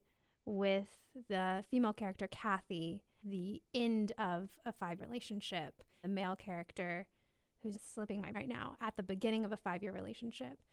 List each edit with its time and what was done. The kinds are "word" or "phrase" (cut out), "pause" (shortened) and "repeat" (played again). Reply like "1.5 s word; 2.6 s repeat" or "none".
3.2 s word; 5.0 s word; 6.0 s word; 7.7 s word; 8.3 s word